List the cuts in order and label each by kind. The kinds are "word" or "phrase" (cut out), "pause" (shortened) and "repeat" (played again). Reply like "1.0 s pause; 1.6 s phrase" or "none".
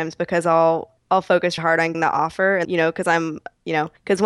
1.6 s word; 1.9 s word; 2.6 s phrase